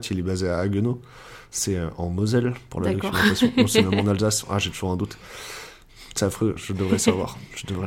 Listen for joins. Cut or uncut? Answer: uncut